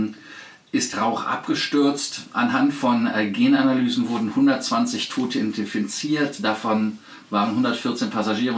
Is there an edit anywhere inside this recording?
yes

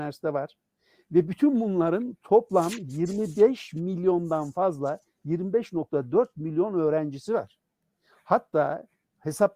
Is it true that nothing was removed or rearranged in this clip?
yes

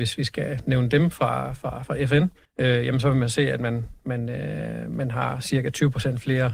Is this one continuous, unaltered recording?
no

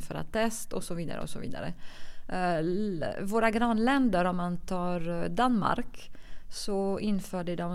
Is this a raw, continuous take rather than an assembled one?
yes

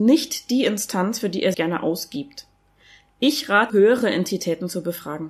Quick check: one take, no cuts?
no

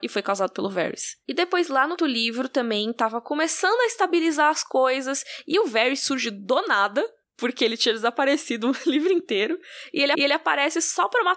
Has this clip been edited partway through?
yes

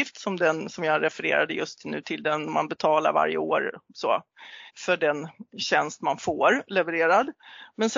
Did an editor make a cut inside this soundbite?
yes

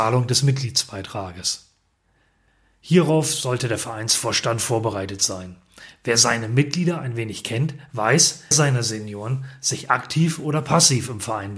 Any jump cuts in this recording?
yes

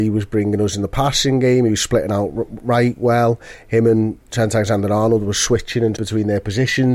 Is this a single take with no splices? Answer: no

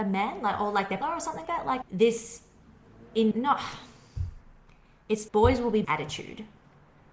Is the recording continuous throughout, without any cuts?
no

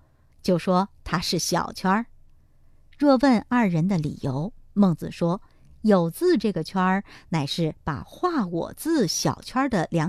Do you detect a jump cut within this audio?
no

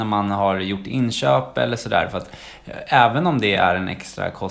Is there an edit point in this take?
no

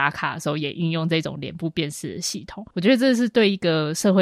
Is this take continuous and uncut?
no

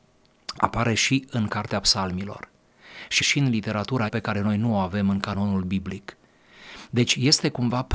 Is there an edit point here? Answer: yes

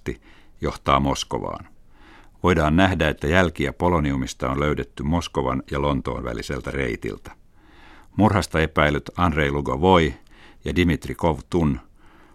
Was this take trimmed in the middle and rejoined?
no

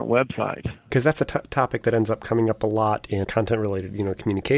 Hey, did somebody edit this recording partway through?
yes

